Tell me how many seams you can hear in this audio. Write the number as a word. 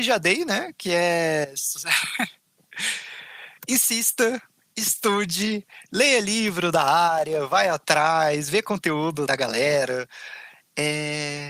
one